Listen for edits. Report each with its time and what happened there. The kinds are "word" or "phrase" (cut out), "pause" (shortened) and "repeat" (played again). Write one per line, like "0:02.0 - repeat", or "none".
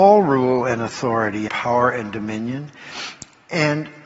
0:01.5 - word